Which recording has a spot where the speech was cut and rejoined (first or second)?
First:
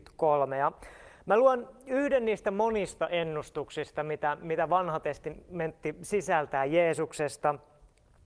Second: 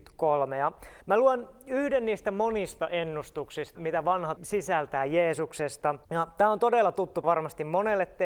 second